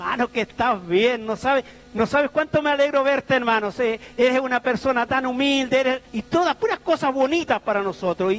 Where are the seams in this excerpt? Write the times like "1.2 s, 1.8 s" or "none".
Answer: 6.1 s